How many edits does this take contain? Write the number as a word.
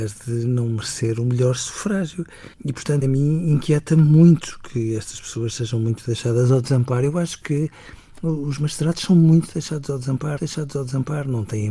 three